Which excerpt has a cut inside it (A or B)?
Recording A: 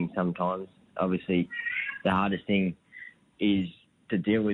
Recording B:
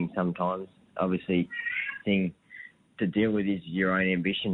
B